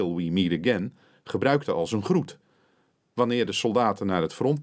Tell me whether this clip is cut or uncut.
uncut